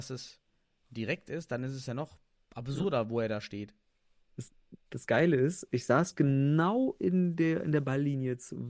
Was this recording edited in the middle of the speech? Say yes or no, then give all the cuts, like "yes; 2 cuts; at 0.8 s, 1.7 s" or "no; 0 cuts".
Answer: no; 0 cuts